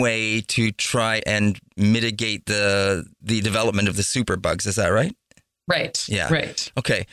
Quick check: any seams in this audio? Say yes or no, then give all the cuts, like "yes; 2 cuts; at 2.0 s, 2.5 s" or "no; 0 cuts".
yes; 2 cuts; at 1.2 s, 3.2 s